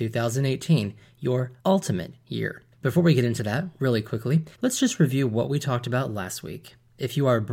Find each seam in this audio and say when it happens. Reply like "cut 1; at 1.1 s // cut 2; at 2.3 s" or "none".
cut 1; at 1.6 s // cut 2; at 2.7 s // cut 3; at 4.5 s